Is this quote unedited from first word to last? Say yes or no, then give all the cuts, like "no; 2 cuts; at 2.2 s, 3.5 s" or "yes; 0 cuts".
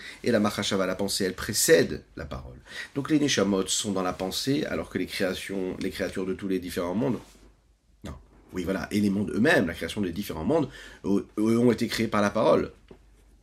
yes; 0 cuts